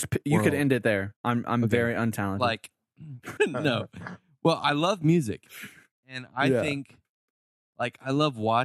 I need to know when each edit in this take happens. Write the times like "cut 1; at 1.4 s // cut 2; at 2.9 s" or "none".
cut 1; at 3.4 s